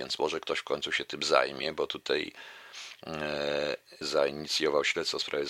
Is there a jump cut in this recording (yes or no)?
yes